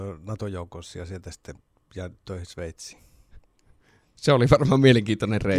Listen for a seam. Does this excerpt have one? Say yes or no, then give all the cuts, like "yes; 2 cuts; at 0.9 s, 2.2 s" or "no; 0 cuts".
no; 0 cuts